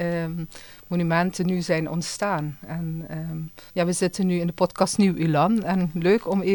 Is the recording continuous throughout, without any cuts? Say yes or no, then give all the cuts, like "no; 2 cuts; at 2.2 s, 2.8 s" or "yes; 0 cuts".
no; 1 cut; at 3.7 s